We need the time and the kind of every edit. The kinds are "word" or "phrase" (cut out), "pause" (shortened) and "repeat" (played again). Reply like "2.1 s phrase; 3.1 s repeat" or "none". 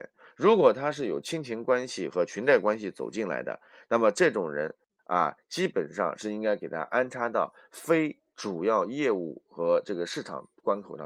none

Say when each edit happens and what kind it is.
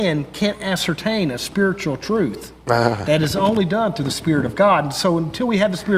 none

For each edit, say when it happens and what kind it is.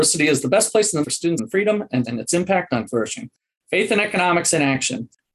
1.0 s word; 1.4 s word; 2.0 s word; 2.9 s word

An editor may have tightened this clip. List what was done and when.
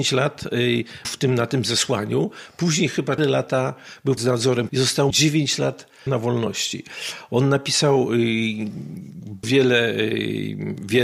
1.0 s word; 3.2 s word; 4.2 s word; 4.7 s word; 5.1 s word; 6.1 s word; 9.4 s word

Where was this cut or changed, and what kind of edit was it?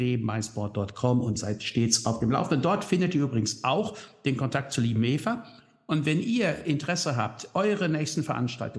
1.4 s word

